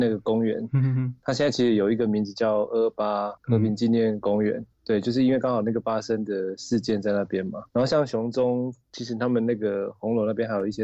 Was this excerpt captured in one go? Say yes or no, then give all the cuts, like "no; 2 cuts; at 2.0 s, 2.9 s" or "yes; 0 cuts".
no; 3 cuts; at 3.4 s, 4.7 s, 7.7 s